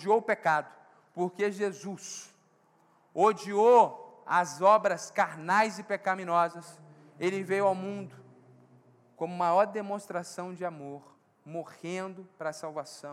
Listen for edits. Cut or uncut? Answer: uncut